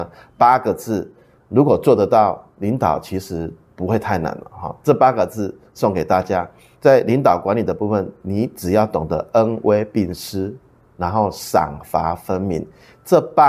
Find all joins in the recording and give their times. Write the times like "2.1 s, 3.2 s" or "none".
6.7 s